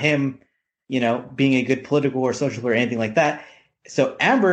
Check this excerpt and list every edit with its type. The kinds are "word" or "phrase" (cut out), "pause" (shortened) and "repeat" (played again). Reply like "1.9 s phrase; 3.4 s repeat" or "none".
none